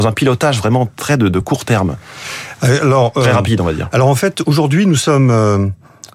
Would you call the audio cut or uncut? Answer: uncut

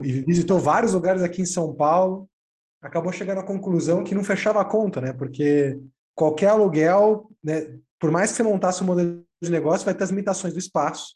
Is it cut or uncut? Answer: cut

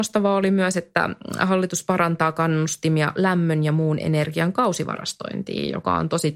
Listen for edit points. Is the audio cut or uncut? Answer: uncut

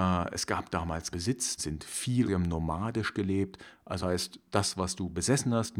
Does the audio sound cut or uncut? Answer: cut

